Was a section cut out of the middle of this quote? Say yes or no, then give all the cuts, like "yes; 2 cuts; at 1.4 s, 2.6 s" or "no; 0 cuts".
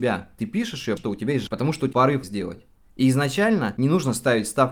yes; 4 cuts; at 1.0 s, 1.5 s, 1.9 s, 2.2 s